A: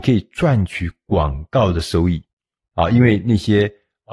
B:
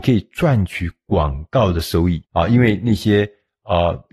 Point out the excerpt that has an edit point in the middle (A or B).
B